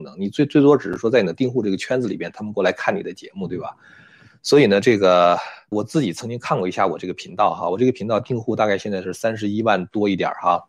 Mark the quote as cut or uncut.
cut